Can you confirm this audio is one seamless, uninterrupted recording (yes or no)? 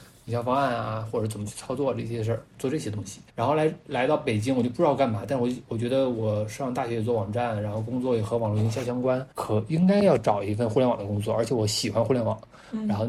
no